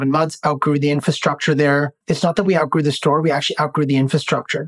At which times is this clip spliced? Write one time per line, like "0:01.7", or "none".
0:02.0